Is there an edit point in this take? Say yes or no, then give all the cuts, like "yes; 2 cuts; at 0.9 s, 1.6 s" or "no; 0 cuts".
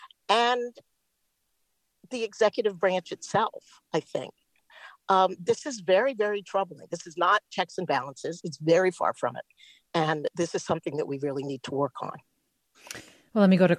no; 0 cuts